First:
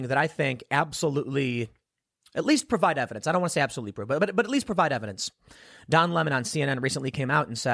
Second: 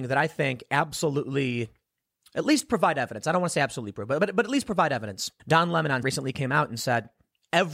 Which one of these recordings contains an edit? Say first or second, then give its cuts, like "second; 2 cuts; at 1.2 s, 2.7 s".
second; 2 cuts; at 5.4 s, 6.0 s